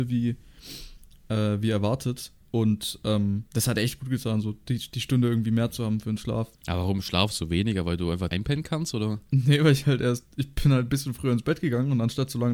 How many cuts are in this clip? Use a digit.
4